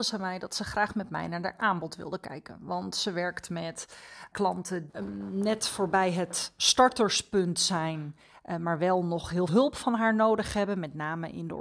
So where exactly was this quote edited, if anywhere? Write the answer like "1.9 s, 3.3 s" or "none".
4.3 s, 4.9 s, 9.5 s

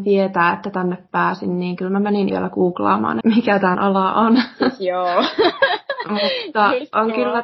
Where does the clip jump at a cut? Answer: 2.3 s, 3.2 s, 3.7 s

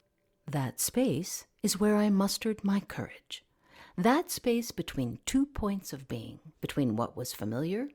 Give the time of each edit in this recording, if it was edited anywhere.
6.5 s

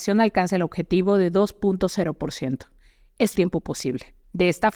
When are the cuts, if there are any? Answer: 3.3 s

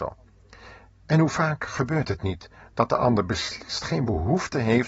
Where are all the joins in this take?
none

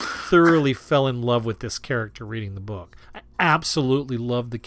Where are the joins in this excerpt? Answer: 3.0 s

